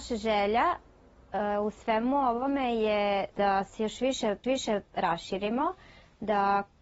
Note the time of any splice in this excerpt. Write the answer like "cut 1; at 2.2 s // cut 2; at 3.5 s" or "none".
cut 1; at 3.3 s // cut 2; at 4.4 s

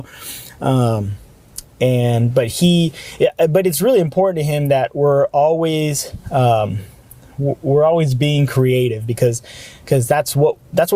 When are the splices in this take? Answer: none

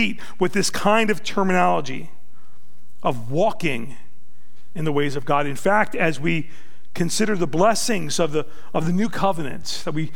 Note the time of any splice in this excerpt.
none

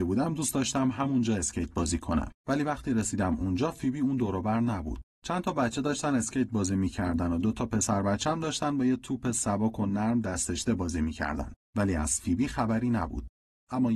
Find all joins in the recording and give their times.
cut 1; at 2.4 s

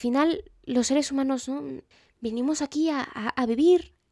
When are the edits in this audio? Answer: cut 1; at 1.9 s

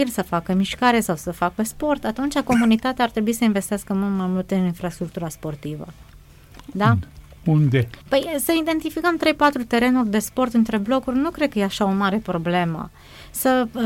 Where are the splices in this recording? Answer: cut 1; at 8.0 s

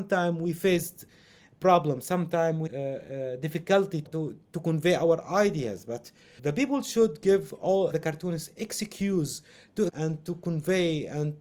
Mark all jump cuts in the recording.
cut 1; at 2.7 s // cut 2; at 4.0 s // cut 3; at 6.4 s // cut 4; at 7.9 s // cut 5; at 9.9 s

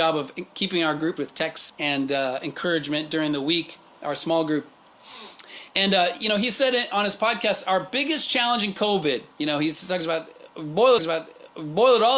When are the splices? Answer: cut 1; at 1.2 s // cut 2; at 1.7 s // cut 3; at 11.0 s

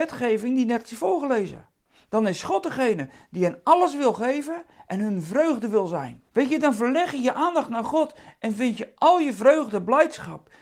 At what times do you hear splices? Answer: cut 1; at 1.9 s // cut 2; at 6.3 s

